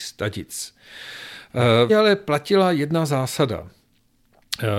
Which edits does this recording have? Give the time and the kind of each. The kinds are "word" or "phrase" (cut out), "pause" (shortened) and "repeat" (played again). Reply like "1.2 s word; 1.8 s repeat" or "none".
1.9 s word

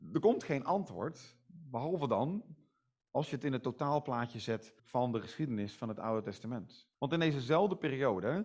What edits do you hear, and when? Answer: 4.8 s pause; 6.9 s pause

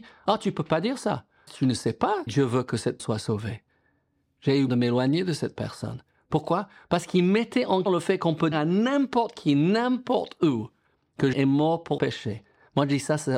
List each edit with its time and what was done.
1.5 s word; 2.3 s word; 3.0 s word; 4.7 s word; 7.9 s word; 8.5 s word; 11.3 s word; 12.0 s word

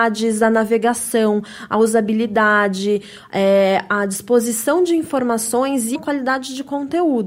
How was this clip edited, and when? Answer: 5.9 s word

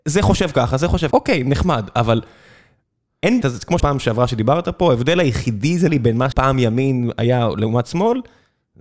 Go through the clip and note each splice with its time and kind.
1.1 s word; 3.4 s word; 3.8 s word; 5.9 s word; 6.3 s word

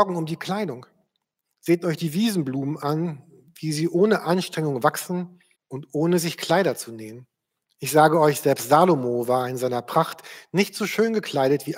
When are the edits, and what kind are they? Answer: 5.5 s pause

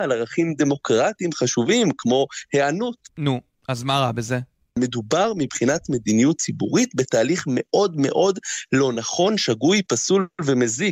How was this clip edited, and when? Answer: none

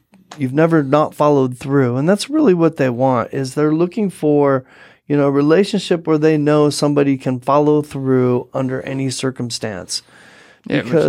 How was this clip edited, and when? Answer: none

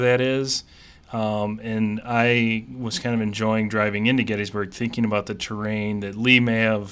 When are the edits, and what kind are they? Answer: none

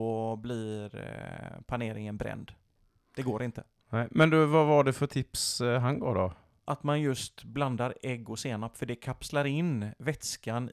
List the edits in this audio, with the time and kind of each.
none

